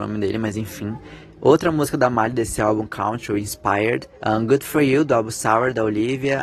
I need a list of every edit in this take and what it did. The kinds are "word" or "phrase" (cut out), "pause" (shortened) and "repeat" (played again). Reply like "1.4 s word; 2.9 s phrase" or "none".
4.2 s pause